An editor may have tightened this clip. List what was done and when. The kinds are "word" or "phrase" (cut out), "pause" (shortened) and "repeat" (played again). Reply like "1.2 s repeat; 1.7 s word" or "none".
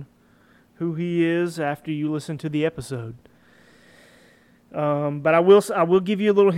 none